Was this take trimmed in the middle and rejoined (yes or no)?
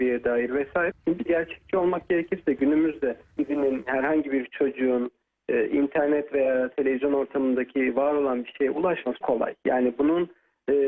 yes